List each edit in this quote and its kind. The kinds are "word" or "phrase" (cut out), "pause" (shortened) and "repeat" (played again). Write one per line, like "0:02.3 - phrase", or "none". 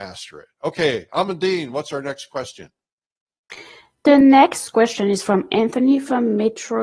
none